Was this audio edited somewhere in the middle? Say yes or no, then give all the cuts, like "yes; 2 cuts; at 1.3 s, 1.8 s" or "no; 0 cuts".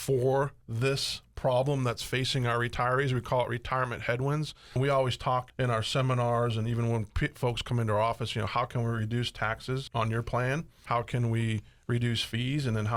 no; 0 cuts